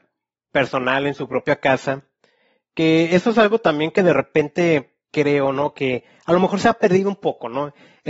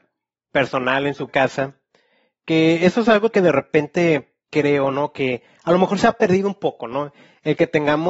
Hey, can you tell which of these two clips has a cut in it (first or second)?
second